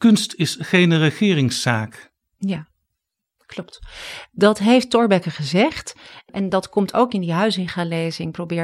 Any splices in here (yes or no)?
no